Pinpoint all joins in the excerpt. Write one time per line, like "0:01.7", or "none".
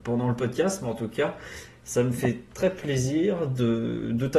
none